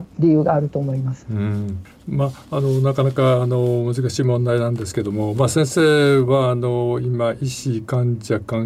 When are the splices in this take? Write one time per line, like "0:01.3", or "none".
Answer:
none